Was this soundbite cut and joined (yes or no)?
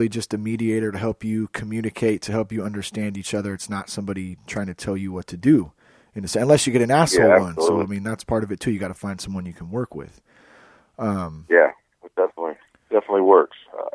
no